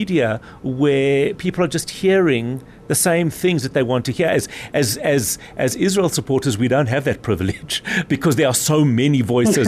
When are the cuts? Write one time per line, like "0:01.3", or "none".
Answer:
none